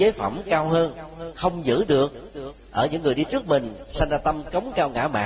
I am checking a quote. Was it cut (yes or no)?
no